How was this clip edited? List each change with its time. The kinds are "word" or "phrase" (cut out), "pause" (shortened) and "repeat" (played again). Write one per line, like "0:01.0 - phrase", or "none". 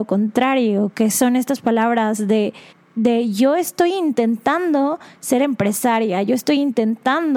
0:02.7 - pause